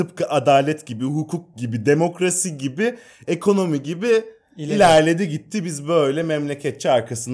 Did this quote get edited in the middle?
no; 0 cuts

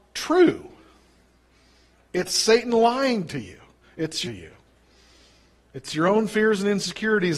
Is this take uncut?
no; 1 cut; at 4.2 s

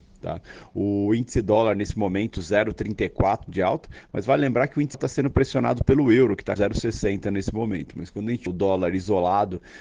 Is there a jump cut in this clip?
yes; 3 cuts; at 4.9 s, 6.6 s, 8.5 s

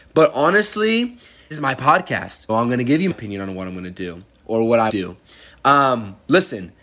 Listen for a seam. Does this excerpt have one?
yes; 4 cuts; at 1.5 s, 2.5 s, 3.1 s, 4.9 s

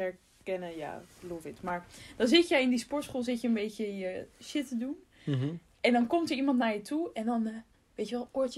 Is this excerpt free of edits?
yes; 0 cuts

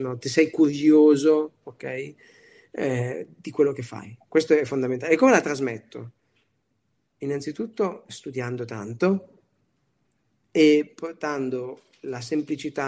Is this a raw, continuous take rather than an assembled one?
yes; 0 cuts

